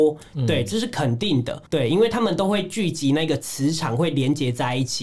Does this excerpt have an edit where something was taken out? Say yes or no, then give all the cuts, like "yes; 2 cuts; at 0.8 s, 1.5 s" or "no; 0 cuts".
yes; 1 cut; at 1.7 s